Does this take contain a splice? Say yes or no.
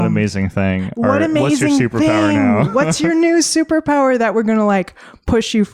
no